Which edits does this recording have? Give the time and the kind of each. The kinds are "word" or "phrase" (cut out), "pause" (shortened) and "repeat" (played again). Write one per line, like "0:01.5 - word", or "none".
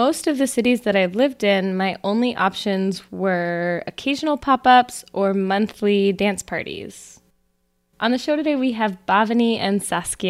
none